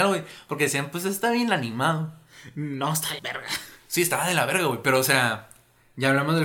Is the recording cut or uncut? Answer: cut